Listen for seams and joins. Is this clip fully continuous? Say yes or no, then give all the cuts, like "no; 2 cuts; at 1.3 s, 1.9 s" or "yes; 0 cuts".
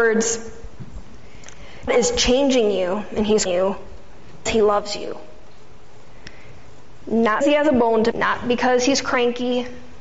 no; 5 cuts; at 1.9 s, 3.5 s, 4.5 s, 7.4 s, 8.1 s